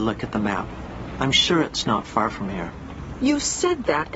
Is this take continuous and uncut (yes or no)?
yes